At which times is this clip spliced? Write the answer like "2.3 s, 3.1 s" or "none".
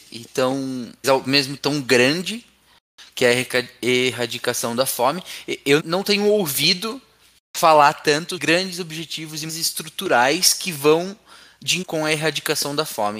1.0 s, 1.6 s, 5.8 s, 8.4 s, 9.5 s, 11.8 s